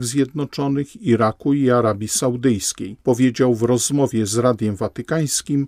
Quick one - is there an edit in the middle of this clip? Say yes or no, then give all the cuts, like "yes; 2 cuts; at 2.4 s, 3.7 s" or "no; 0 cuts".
no; 0 cuts